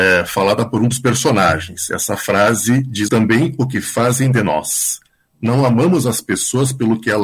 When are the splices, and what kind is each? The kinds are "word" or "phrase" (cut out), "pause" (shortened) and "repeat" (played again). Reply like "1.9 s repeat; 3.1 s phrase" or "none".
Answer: 3.1 s phrase